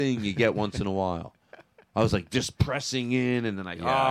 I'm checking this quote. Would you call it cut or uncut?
uncut